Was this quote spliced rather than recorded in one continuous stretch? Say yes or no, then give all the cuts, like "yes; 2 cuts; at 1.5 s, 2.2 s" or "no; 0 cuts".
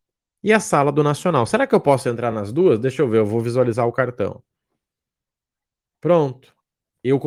no; 0 cuts